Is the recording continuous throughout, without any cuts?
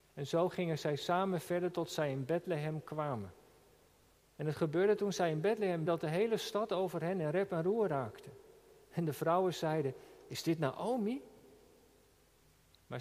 no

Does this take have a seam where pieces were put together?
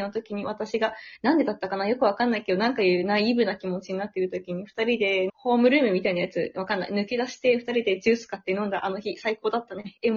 yes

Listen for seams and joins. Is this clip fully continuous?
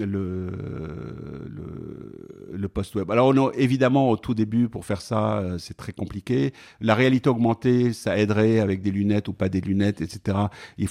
yes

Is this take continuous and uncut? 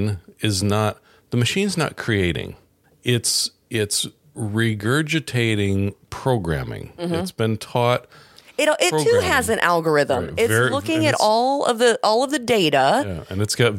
no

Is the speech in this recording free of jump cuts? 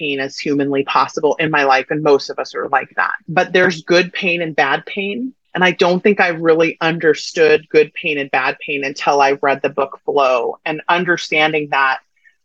no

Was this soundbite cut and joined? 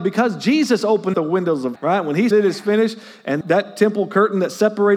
yes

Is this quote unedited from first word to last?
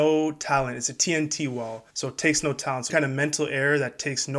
no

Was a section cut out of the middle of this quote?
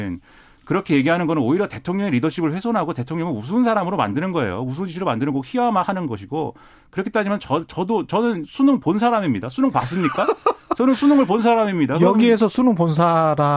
no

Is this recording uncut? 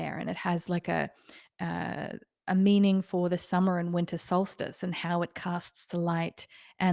yes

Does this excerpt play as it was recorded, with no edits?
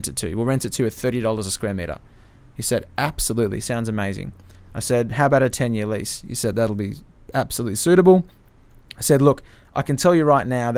yes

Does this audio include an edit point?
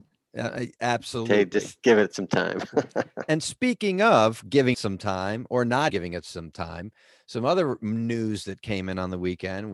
yes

